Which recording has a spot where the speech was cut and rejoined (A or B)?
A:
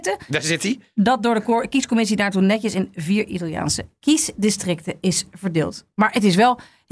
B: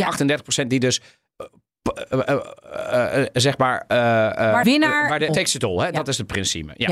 B